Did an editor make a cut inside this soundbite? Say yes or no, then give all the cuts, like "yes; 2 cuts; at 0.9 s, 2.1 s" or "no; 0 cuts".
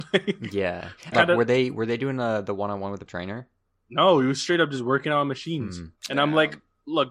yes; 3 cuts; at 1.1 s, 3.1 s, 6.0 s